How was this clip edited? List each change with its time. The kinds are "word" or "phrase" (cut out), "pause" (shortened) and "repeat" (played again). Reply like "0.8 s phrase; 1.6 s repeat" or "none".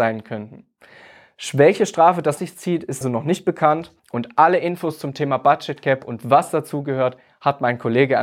2.4 s word; 3.0 s word; 4.0 s pause